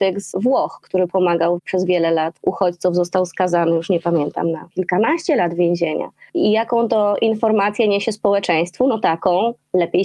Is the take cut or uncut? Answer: uncut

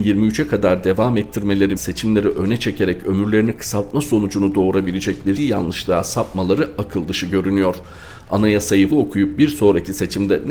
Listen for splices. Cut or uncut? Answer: cut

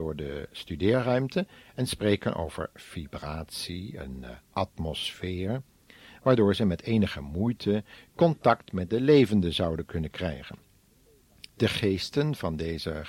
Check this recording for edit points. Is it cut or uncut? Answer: cut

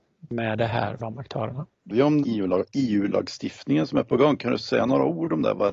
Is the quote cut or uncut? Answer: cut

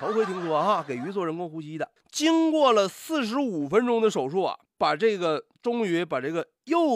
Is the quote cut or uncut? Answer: uncut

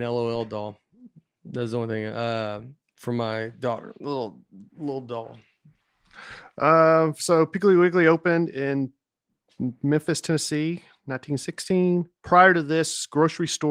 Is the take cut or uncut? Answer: uncut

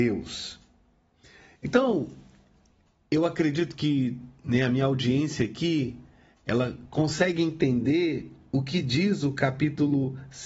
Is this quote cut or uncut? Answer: uncut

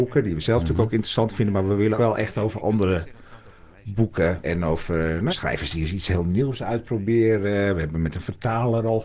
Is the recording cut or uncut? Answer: cut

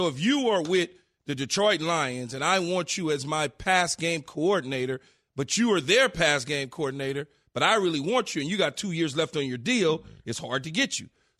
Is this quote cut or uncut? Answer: uncut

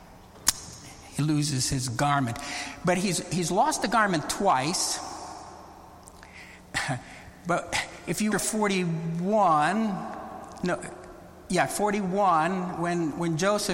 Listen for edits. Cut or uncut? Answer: cut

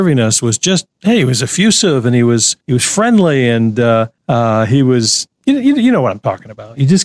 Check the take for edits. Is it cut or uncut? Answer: cut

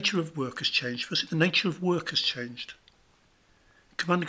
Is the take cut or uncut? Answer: uncut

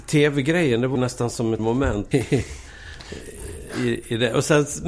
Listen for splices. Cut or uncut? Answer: cut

